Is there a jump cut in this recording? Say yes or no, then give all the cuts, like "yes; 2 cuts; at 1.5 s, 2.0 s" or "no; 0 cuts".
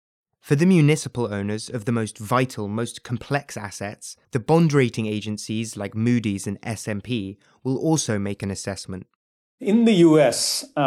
yes; 2 cuts; at 4.2 s, 9.4 s